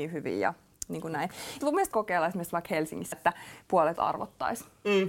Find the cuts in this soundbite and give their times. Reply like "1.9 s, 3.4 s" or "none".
1.6 s, 1.9 s, 3.1 s, 4.0 s